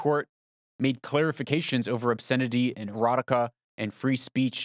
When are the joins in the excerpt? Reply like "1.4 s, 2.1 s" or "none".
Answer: none